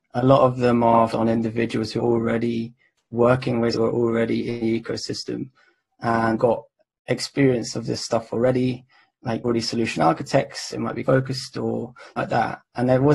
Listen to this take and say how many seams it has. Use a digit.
8